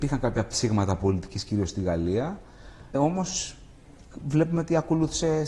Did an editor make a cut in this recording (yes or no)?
yes